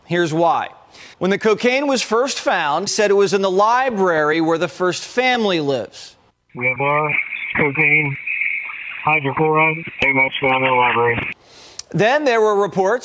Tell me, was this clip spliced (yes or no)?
yes